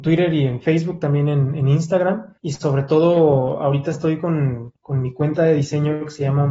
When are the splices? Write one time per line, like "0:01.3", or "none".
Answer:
0:02.4
0:04.8